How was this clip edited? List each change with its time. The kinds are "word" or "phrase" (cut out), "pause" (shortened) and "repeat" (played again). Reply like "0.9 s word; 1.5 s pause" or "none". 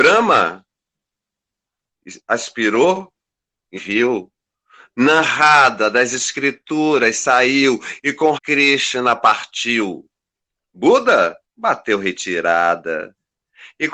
3.7 s word; 8.3 s word; 11.4 s pause